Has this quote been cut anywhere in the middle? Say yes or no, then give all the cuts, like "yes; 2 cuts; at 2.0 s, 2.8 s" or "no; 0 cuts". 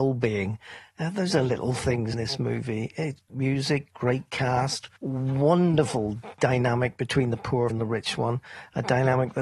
yes; 5 cuts; at 1.3 s, 2.1 s, 3.3 s, 5.0 s, 7.7 s